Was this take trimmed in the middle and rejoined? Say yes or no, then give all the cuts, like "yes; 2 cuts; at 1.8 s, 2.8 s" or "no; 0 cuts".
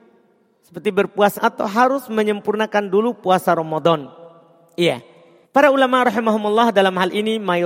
yes; 2 cuts; at 1.3 s, 5.4 s